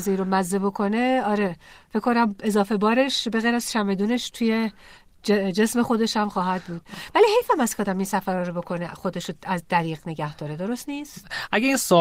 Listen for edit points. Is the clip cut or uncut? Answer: uncut